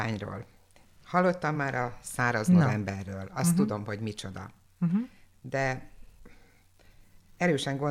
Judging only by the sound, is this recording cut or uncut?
uncut